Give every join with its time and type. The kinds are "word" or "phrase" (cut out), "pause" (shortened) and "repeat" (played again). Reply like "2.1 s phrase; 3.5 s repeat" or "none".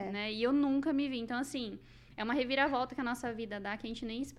none